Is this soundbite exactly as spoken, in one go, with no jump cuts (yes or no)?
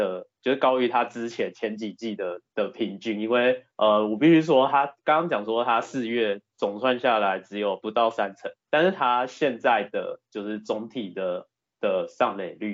no